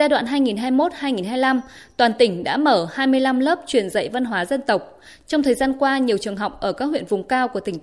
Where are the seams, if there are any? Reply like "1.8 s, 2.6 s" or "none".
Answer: none